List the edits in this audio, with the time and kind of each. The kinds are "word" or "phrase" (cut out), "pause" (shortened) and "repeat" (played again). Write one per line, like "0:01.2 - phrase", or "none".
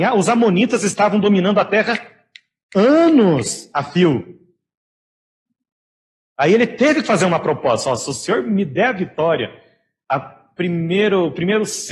none